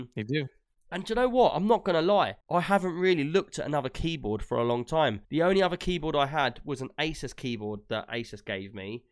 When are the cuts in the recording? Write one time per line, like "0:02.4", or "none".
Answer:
0:02.4
0:05.2